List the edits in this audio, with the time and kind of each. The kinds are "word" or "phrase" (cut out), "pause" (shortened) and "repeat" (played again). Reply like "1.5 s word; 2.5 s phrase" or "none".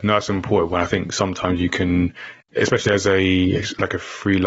none